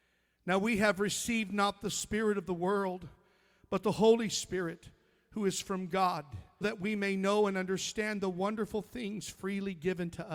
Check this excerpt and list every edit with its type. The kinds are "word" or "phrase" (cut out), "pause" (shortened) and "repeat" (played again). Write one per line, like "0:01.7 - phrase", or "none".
0:06.6 - word